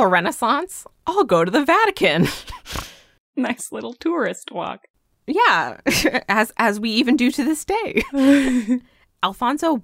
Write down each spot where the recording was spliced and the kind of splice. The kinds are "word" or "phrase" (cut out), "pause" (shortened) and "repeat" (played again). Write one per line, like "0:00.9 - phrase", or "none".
none